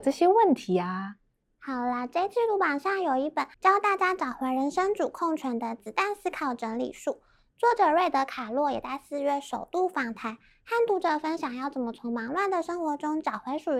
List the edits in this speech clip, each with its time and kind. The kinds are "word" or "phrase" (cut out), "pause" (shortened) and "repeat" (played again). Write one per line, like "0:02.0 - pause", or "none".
0:03.5 - pause